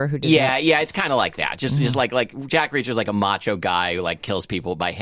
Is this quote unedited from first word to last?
yes; 0 cuts

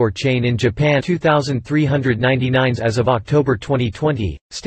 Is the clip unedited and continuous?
no; 2 cuts; at 1.0 s, 2.8 s

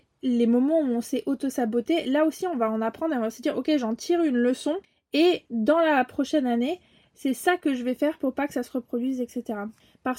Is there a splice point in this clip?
no; 0 cuts

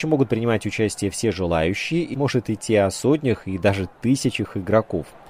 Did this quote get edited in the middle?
yes; 1 cut; at 2.1 s

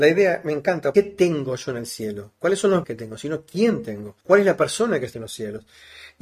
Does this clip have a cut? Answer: yes; 4 cuts; at 0.9 s, 2.8 s, 4.2 s, 5.1 s

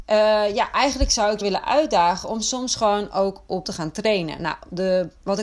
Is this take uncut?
no; 2 cuts; at 1.4 s, 3.6 s

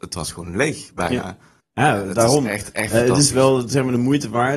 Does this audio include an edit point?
yes; 1 cut; at 1.6 s

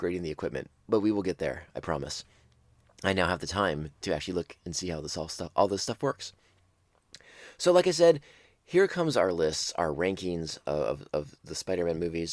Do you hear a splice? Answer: no; 0 cuts

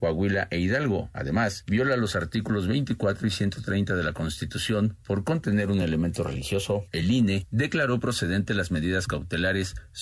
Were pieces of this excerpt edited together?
no; 0 cuts

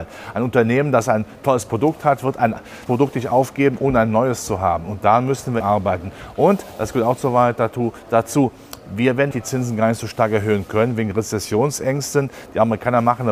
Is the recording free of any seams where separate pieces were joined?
no; 3 cuts; at 2.9 s, 5.6 s, 9.3 s

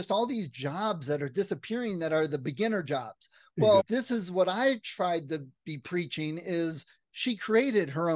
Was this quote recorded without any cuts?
yes; 0 cuts

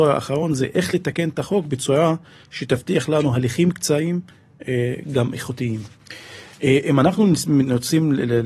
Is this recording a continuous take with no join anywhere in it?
yes; 0 cuts

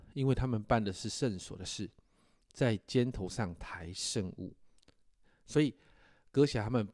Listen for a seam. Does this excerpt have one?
no; 0 cuts

